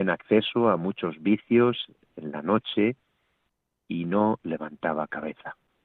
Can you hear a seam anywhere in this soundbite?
no; 0 cuts

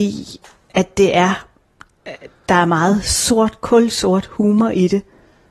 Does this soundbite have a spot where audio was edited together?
no; 0 cuts

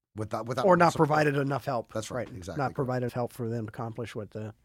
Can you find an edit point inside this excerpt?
yes; 2 cuts; at 3.1 s, 3.7 s

